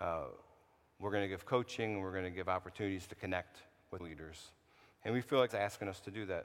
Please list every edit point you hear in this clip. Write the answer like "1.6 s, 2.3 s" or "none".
4.0 s, 5.5 s